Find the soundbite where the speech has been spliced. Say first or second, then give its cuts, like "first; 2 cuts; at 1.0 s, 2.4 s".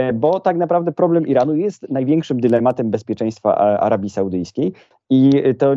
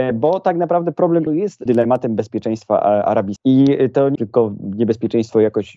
second; 4 cuts; at 1.3 s, 1.7 s, 3.4 s, 4.2 s